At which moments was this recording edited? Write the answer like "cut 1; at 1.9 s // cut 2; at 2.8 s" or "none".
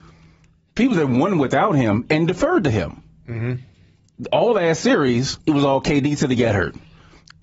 cut 1; at 5.4 s